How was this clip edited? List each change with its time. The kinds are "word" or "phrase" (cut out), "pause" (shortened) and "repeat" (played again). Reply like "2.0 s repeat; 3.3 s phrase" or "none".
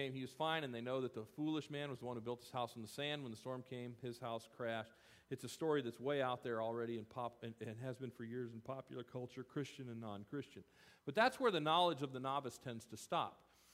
none